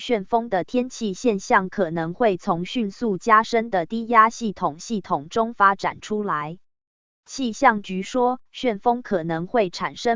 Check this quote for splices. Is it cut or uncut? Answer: uncut